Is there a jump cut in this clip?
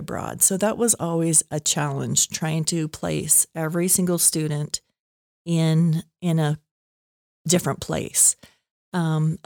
no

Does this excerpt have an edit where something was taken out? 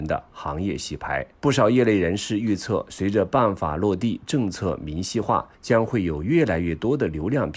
yes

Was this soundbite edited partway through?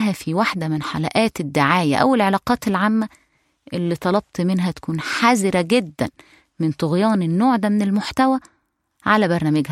no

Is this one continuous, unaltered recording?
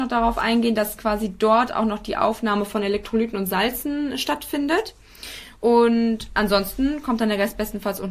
no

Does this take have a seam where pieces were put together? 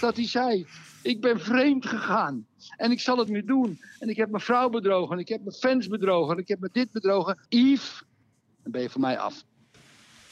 yes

